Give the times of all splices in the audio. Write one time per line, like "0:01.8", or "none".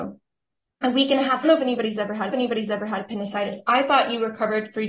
0:01.4
0:02.3